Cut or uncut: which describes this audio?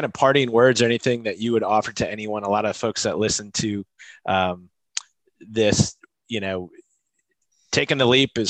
uncut